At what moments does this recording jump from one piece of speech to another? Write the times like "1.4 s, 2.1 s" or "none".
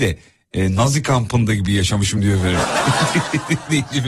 none